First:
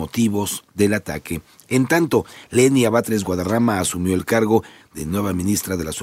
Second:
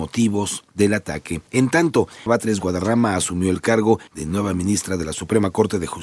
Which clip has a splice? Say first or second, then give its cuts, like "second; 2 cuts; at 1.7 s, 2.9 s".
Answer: second; 3 cuts; at 1.5 s, 2.3 s, 4.1 s